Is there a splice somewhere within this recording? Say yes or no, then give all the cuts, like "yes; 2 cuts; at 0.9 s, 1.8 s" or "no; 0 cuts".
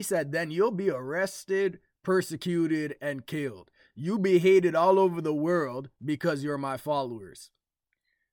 no; 0 cuts